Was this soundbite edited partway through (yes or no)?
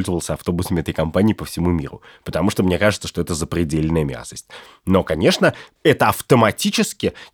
no